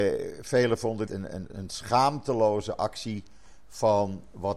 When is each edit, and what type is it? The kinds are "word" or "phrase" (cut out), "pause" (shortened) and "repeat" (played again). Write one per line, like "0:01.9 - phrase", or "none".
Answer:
0:01.1 - phrase